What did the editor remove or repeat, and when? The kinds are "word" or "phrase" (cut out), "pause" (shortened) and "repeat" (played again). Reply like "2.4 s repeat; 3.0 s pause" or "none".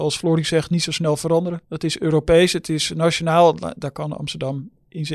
1.6 s pause